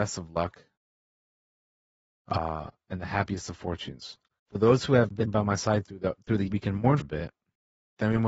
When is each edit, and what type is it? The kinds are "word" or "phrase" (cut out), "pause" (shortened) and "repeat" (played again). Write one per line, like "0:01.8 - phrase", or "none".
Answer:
0:04.4 - pause
0:06.5 - word
0:07.0 - word